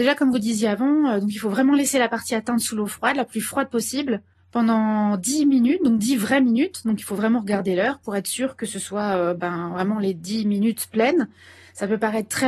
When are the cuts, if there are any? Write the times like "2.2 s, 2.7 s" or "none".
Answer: none